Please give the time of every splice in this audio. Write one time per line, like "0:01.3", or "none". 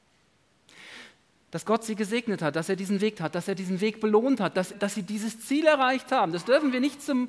0:03.2
0:04.7